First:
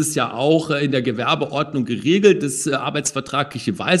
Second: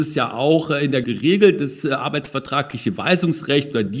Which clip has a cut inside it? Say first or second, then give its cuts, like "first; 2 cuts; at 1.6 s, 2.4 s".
second; 1 cut; at 1.0 s